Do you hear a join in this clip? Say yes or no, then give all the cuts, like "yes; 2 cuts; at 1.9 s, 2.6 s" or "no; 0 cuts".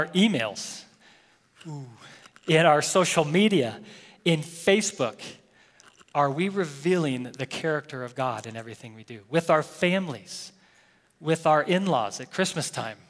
no; 0 cuts